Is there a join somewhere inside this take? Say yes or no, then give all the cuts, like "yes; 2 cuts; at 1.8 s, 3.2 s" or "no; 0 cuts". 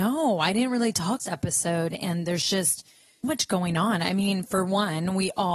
yes; 2 cuts; at 1.2 s, 3.2 s